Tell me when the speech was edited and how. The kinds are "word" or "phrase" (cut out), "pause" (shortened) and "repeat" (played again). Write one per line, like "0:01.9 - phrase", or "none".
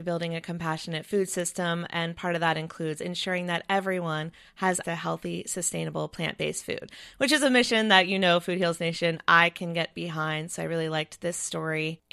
0:04.8 - word